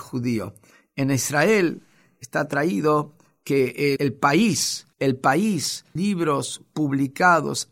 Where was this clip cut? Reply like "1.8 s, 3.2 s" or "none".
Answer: 4.0 s, 4.9 s, 6.0 s